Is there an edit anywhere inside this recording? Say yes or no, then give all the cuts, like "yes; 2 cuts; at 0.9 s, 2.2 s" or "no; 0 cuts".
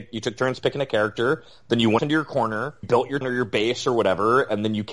yes; 3 cuts; at 2.0 s, 2.8 s, 3.2 s